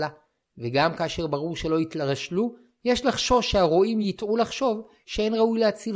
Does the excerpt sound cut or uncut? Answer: uncut